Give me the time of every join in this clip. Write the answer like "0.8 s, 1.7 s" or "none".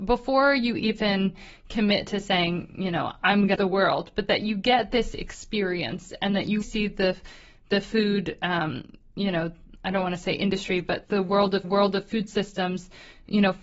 3.6 s, 6.6 s, 11.0 s, 11.6 s